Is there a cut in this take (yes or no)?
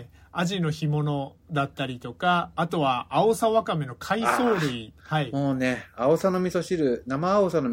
yes